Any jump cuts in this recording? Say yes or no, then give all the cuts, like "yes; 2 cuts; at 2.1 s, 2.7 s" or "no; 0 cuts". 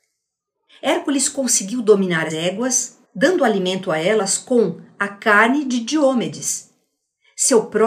yes; 2 cuts; at 2.3 s, 3.0 s